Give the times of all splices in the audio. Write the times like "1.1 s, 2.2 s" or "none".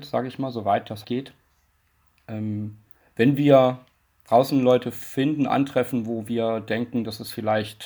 1.0 s